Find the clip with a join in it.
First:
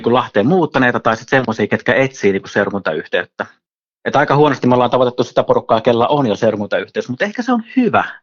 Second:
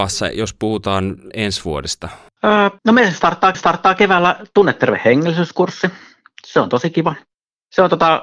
second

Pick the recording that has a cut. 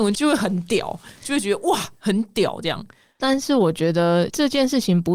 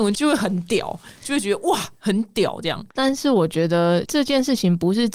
second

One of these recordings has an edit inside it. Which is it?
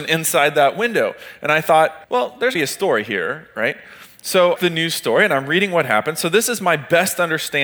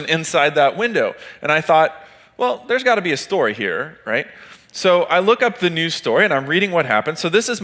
first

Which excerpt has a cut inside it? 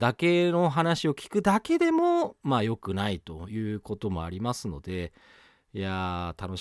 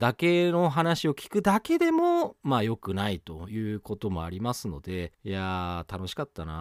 second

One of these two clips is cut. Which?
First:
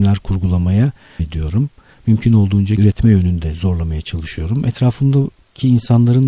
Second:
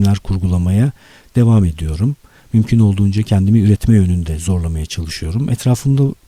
first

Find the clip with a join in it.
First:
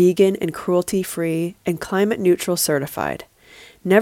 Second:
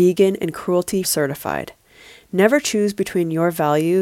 second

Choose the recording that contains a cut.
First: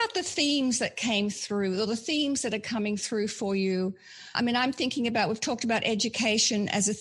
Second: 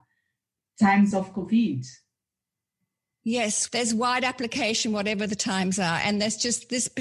first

